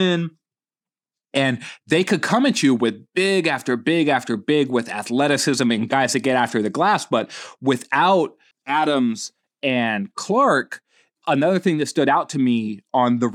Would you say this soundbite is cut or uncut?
uncut